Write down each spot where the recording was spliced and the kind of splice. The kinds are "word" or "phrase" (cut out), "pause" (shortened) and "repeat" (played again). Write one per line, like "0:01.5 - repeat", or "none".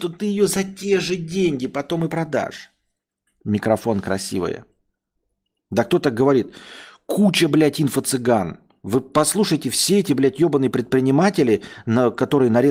none